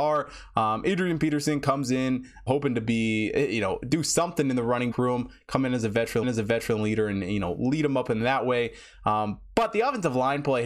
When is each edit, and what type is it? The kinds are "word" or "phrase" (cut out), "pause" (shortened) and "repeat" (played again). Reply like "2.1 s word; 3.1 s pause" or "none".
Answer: 2.5 s word; 4.9 s word; 6.2 s repeat